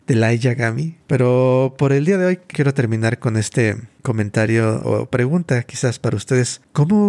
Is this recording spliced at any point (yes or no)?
yes